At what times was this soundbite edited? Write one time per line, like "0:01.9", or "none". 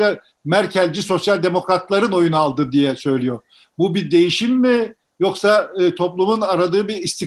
none